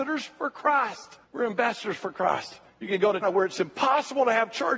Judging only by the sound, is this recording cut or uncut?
cut